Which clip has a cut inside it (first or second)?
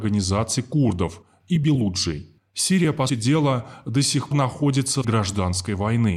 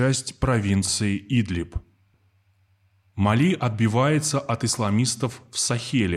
first